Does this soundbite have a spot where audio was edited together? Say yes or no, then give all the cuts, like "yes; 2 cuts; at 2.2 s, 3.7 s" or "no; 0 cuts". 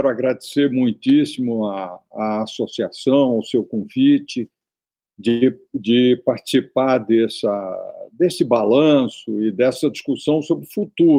no; 0 cuts